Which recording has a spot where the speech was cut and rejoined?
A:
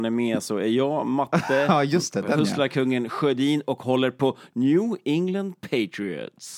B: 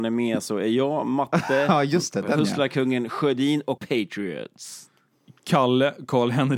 B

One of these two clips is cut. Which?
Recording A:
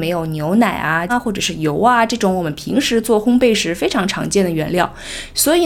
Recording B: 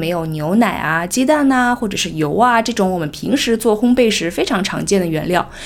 A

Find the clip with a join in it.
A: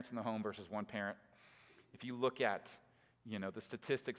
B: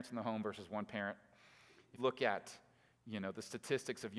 B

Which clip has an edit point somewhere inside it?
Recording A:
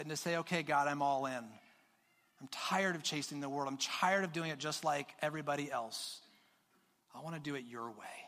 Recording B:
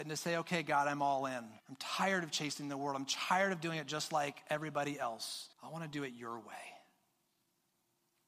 B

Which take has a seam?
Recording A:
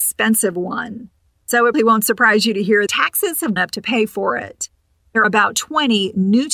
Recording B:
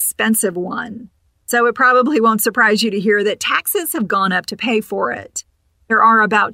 A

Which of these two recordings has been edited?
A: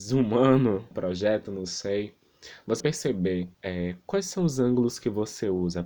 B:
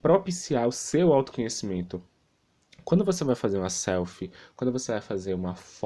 A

